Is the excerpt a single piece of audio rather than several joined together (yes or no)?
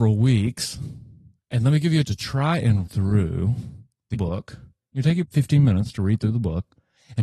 no